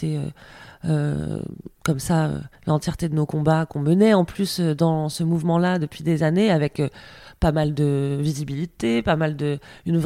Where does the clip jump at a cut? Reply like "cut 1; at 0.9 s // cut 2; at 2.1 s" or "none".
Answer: cut 1; at 2.6 s